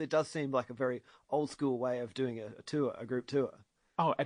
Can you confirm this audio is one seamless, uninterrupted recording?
yes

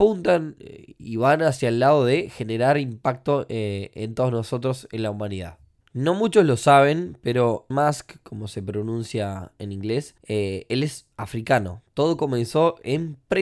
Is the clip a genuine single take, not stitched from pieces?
no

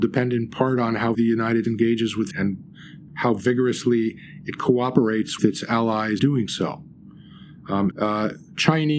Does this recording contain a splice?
yes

